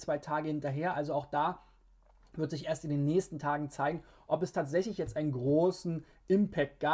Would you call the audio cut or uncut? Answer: uncut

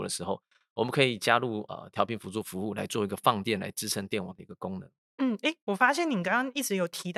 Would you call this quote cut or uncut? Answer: uncut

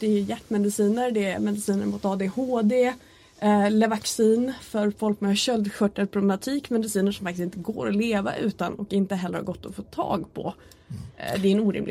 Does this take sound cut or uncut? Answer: uncut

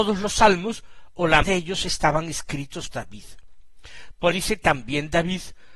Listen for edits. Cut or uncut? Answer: cut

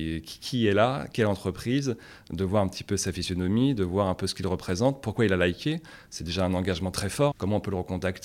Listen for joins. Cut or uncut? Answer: cut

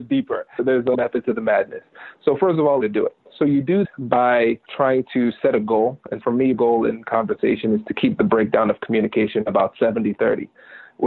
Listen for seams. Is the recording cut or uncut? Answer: cut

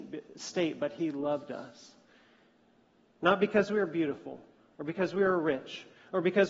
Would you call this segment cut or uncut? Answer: uncut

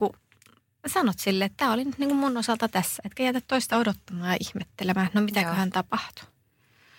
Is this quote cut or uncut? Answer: uncut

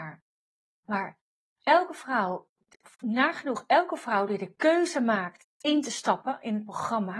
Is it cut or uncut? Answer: uncut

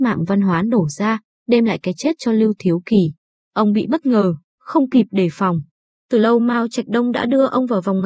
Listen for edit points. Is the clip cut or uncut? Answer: uncut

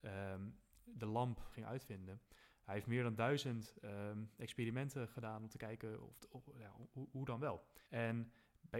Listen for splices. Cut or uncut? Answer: cut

